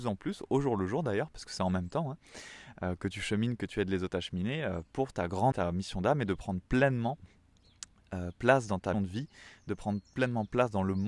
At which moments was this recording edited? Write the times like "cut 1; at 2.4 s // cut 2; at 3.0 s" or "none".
cut 1; at 5.5 s // cut 2; at 8.9 s